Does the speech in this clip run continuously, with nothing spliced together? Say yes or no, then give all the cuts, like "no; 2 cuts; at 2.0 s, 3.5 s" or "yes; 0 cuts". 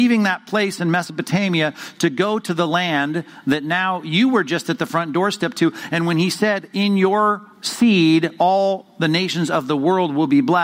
no; 1 cut; at 7.5 s